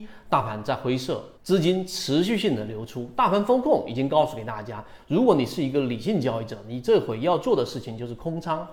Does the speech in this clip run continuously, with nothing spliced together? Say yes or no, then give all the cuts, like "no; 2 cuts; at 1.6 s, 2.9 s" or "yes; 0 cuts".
no; 1 cut; at 1.4 s